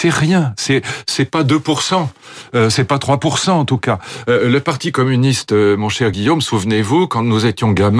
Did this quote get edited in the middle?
no; 0 cuts

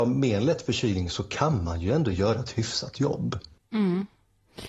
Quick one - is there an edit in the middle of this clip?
no; 0 cuts

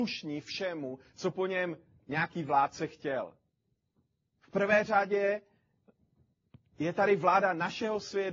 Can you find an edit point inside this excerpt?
no; 0 cuts

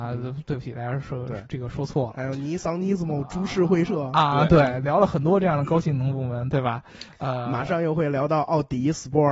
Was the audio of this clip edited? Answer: no; 0 cuts

